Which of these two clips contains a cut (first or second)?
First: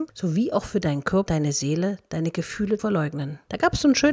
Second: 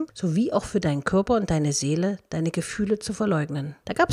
first